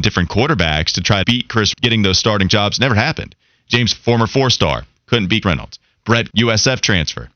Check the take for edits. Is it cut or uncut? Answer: cut